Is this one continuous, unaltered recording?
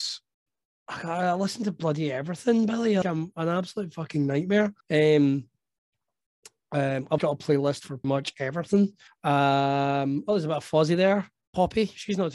no; 5 cuts; at 3.0 s, 4.8 s, 7.2 s, 8.0 s, 9.1 s

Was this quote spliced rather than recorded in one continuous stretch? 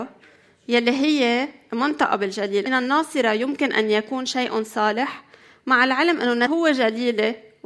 yes; 2 cuts; at 2.7 s, 6.5 s

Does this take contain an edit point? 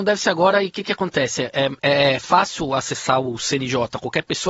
no; 0 cuts

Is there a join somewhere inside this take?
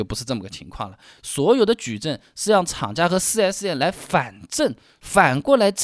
no; 0 cuts

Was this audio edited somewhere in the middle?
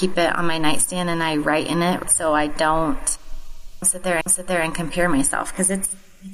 yes; 2 cuts; at 2.0 s, 4.2 s

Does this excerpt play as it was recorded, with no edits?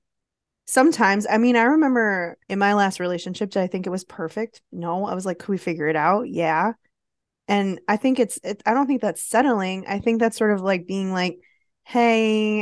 no; 1 cut; at 2.4 s

